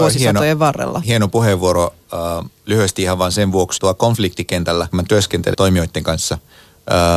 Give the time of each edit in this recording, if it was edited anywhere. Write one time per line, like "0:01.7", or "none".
0:03.8
0:04.9
0:05.5